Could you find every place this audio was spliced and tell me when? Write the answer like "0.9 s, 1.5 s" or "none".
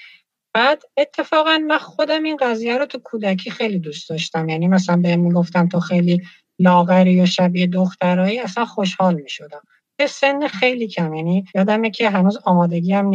11.5 s